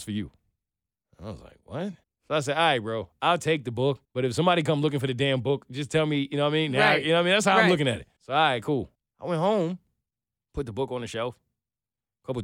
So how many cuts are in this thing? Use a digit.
5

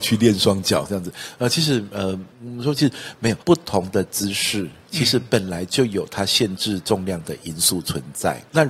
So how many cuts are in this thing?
2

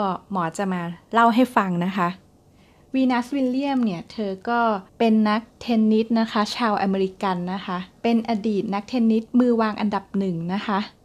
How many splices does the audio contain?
3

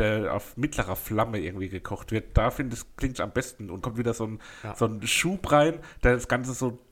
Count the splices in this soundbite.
2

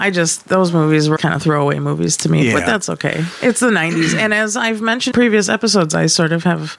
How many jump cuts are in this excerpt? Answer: 2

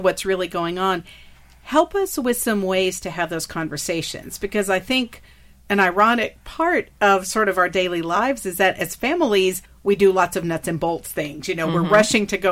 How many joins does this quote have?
1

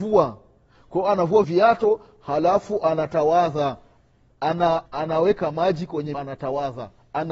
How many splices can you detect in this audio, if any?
3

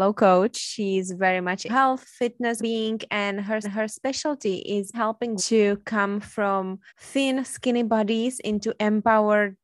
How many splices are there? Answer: 6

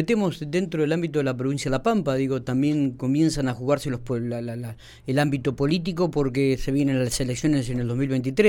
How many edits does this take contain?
0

